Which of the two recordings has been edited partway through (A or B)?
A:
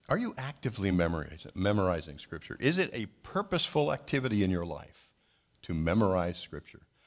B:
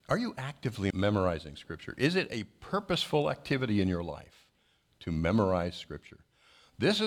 B